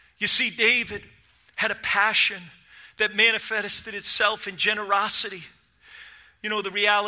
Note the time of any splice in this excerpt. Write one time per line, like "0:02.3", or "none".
none

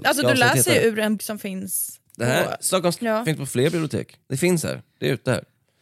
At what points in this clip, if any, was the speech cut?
0:01.2
0:03.0
0:04.2

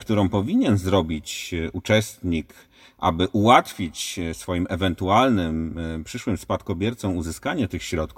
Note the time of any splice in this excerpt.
none

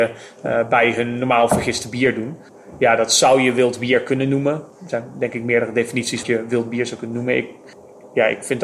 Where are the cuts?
0:06.2

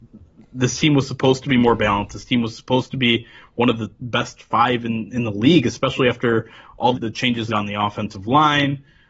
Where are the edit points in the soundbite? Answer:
0:05.1
0:06.9
0:07.5

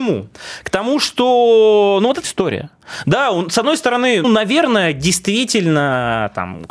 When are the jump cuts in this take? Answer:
0:02.2
0:04.2

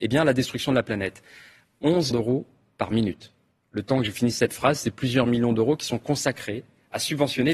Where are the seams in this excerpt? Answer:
0:02.1
0:03.5

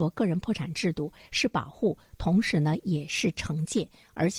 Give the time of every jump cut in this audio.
none

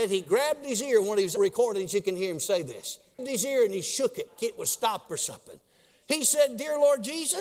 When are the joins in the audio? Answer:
0:01.4
0:03.2
0:04.4
0:05.1

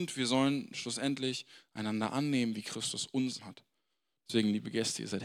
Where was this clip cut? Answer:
0:03.4

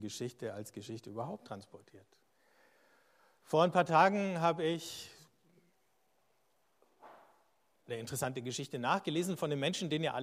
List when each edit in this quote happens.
none

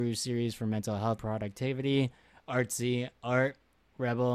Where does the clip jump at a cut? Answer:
0:01.2
0:03.2

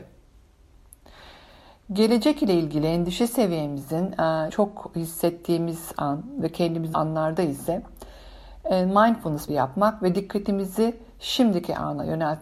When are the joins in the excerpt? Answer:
0:04.5
0:06.9
0:09.5

